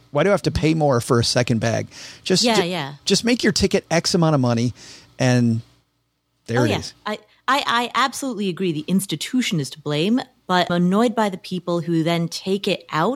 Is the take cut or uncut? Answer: cut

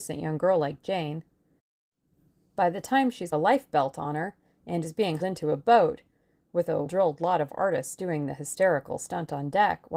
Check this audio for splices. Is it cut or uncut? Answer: cut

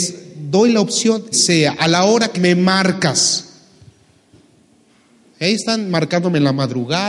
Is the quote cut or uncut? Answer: cut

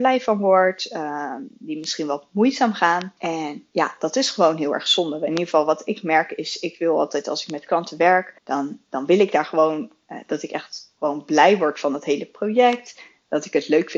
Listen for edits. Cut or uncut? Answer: cut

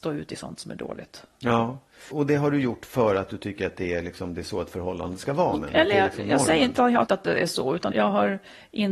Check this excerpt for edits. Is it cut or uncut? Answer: cut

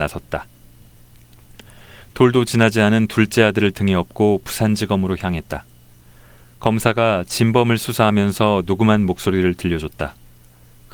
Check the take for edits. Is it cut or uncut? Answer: uncut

